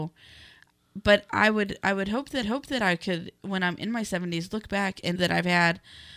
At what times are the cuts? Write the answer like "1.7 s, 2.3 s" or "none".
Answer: 2.4 s, 5.2 s